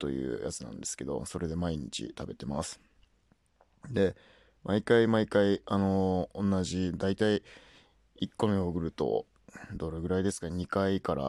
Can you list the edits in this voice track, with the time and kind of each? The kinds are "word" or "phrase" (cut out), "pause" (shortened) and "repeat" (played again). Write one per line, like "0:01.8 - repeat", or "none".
none